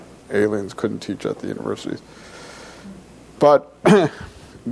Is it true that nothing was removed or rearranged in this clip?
yes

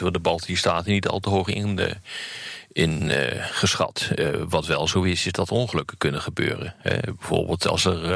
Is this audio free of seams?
yes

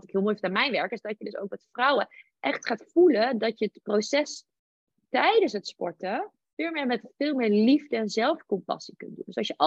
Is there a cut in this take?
no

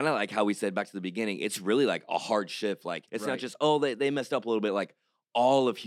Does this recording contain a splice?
yes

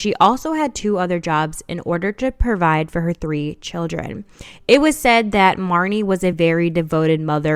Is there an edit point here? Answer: no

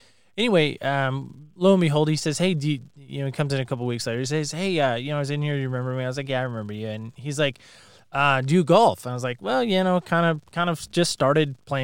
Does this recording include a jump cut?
no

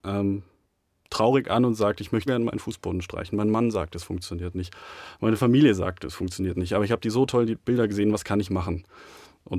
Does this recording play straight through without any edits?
no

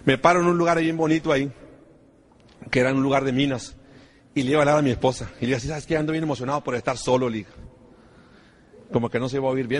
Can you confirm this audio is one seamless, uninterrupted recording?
yes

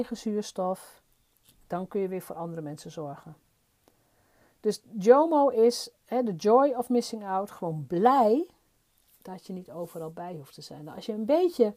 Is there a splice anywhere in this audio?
no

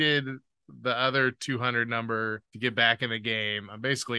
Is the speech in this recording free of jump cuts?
no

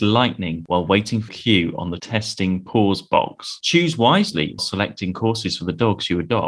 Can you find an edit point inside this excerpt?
yes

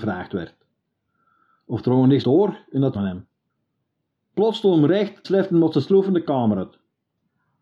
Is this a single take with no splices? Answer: no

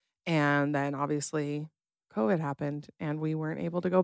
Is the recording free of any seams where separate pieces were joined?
yes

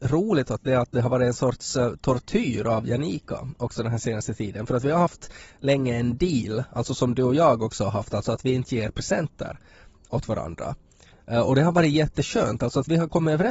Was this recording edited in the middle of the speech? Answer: no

